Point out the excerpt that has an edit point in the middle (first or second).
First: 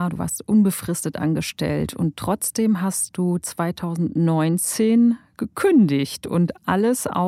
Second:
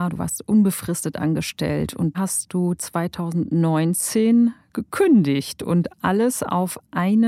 second